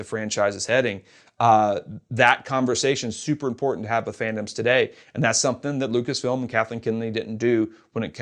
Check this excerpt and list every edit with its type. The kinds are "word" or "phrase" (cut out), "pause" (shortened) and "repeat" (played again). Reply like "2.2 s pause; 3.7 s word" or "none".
none